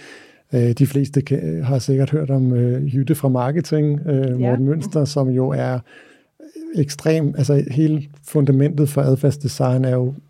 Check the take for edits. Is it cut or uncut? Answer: uncut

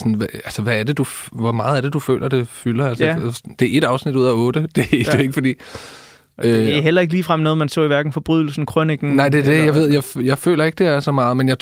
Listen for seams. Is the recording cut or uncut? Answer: uncut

